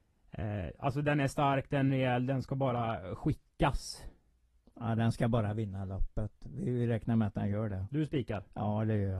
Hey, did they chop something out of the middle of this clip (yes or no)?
no